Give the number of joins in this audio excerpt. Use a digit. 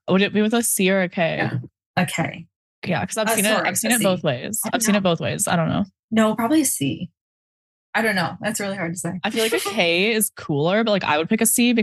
0